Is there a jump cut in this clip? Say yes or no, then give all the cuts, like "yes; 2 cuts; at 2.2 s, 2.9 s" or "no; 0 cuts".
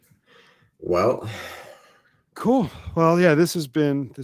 no; 0 cuts